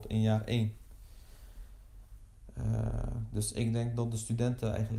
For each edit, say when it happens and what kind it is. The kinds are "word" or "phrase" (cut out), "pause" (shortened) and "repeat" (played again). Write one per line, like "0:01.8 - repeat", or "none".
none

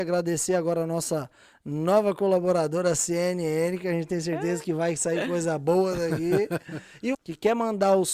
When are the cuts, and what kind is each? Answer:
0:07.1 - word

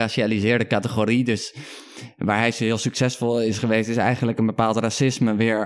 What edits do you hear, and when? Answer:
none

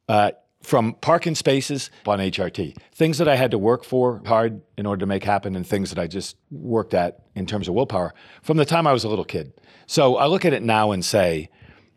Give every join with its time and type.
0:02.0 - phrase
0:04.2 - word
0:06.4 - pause

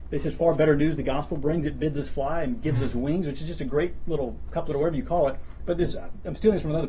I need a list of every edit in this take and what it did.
none

